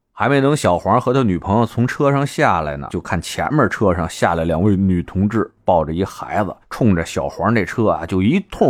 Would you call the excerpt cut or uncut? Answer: cut